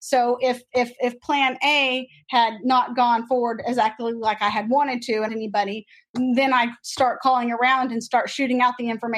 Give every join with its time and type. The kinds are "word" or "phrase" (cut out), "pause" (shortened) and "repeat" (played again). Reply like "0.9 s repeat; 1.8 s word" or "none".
5.3 s phrase